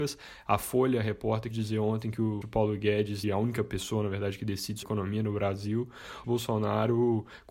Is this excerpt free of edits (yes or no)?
no